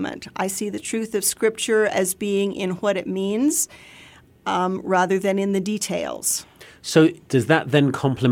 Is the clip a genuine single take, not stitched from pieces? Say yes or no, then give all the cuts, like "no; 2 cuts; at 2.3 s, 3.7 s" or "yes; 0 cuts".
yes; 0 cuts